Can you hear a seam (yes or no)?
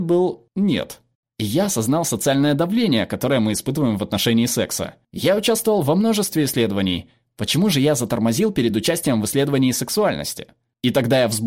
no